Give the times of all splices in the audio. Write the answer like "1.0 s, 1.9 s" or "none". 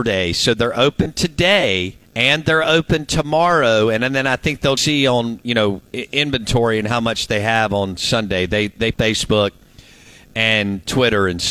2.1 s, 4.8 s, 5.9 s, 8.9 s

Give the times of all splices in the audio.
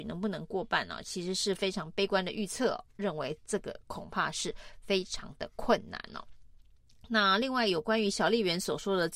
none

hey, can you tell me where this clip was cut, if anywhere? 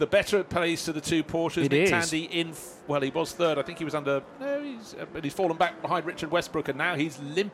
none

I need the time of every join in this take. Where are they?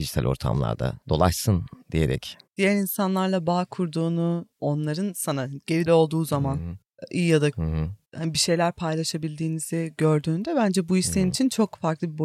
1.0 s, 2.5 s, 4.5 s, 5.9 s, 7.5 s, 8.0 s

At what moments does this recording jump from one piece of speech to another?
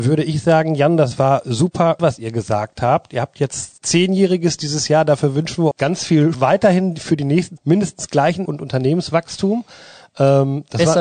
2.0 s, 3.8 s, 5.7 s, 6.3 s, 7.6 s, 8.5 s

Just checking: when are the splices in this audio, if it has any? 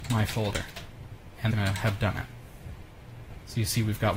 1.5 s

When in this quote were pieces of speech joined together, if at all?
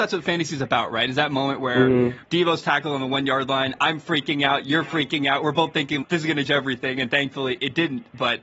6.0 s, 6.5 s

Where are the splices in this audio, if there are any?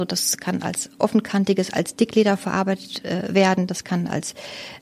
none

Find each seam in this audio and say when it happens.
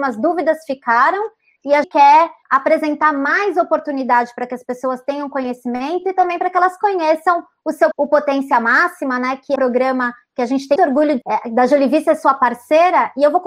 1.8 s, 2.4 s, 7.9 s, 9.6 s, 10.8 s, 11.2 s

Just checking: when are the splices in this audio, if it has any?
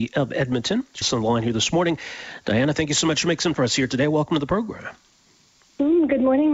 1.0 s, 3.5 s

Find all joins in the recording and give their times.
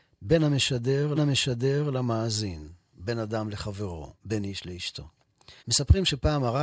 1.1 s, 4.2 s, 5.6 s

